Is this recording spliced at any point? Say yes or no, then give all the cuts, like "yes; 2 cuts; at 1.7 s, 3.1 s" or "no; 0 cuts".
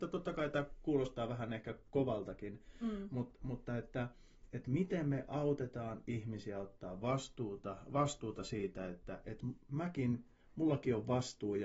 no; 0 cuts